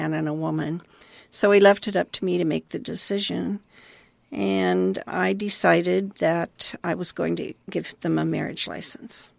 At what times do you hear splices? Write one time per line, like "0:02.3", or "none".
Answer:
none